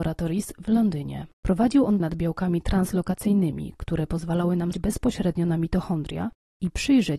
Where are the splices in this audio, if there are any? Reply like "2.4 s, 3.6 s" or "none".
1.3 s, 2.0 s, 4.7 s